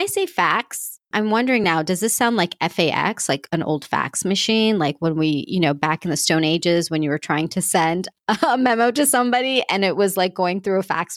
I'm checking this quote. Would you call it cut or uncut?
uncut